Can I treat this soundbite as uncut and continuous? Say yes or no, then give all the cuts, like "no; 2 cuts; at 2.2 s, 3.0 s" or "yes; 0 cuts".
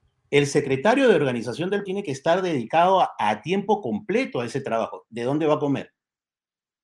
no; 1 cut; at 1.9 s